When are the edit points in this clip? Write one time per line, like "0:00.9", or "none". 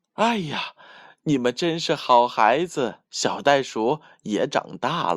0:03.0